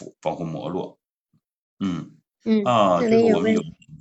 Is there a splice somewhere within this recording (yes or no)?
no